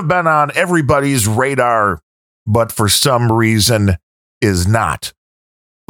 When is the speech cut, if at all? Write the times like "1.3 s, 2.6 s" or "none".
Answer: none